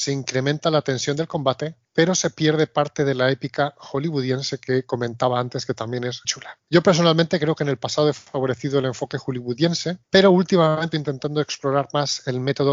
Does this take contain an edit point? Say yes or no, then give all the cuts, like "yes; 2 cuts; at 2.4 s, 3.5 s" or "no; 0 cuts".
yes; 3 cuts; at 6.2 s, 10.0 s, 10.9 s